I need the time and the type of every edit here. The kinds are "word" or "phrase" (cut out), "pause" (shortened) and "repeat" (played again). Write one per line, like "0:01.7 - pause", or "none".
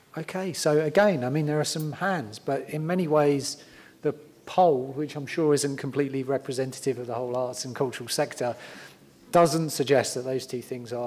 none